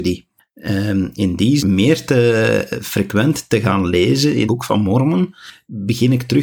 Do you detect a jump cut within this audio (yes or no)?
yes